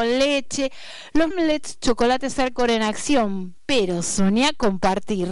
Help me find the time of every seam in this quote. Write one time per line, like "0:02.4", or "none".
0:01.3